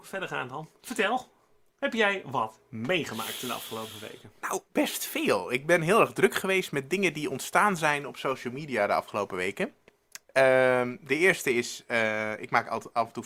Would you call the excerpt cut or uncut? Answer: uncut